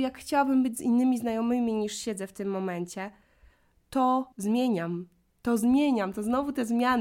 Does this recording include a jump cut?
yes; 1 cut; at 4.3 s

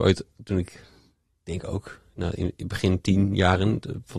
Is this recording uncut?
yes; 0 cuts

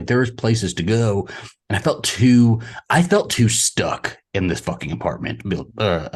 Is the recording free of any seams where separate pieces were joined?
yes; 0 cuts

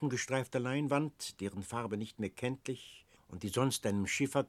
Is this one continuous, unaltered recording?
no; 1 cut; at 3.2 s

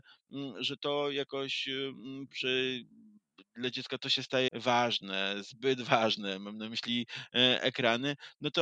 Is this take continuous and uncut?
no; 2 cuts; at 2.3 s, 4.5 s

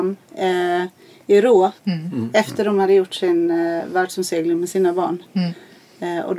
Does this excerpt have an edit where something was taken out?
yes; 1 cut; at 1.8 s

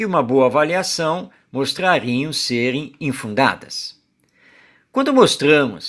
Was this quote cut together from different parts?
no; 0 cuts

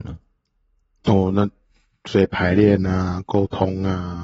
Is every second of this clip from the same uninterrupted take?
yes; 0 cuts

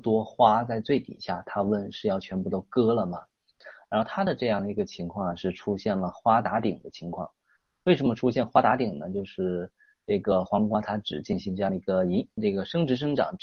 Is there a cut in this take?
no; 0 cuts

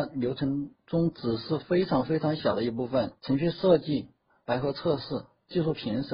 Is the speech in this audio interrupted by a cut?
yes; 1 cut; at 3.2 s

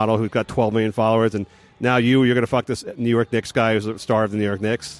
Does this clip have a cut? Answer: no; 0 cuts

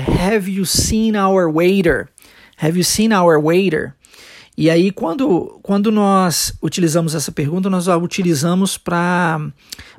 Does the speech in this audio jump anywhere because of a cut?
no; 0 cuts

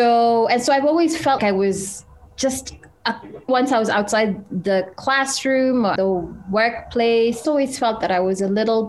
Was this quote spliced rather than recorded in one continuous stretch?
yes; 4 cuts; at 1.4 s, 3.5 s, 6.0 s, 7.4 s

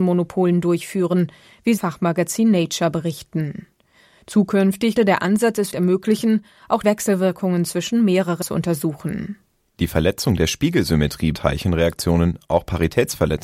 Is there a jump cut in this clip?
yes; 6 cuts; at 1.8 s, 5.0 s, 5.7 s, 6.8 s, 8.4 s, 11.3 s

